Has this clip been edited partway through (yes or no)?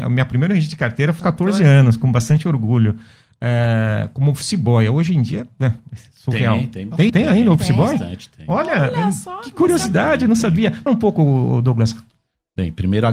yes